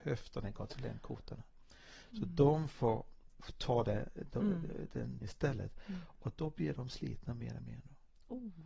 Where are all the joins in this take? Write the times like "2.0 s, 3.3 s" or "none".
5.2 s